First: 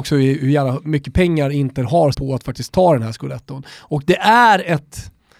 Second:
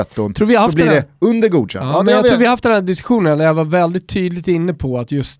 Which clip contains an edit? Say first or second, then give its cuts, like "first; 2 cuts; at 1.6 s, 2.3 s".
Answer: first; 1 cut; at 2.1 s